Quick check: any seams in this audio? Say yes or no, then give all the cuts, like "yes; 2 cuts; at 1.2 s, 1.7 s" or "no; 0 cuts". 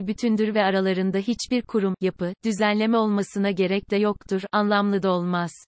no; 0 cuts